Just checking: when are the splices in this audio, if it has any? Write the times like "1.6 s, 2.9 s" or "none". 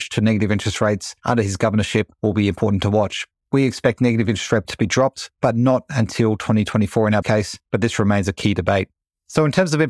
4.6 s, 7.2 s